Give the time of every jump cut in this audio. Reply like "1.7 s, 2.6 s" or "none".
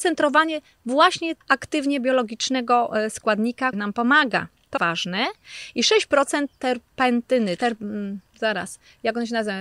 1.4 s, 3.7 s, 4.8 s, 7.6 s